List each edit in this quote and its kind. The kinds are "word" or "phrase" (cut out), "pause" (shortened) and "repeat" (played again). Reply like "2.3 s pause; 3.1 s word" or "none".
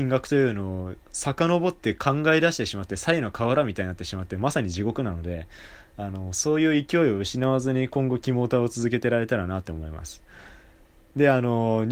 1.0 s pause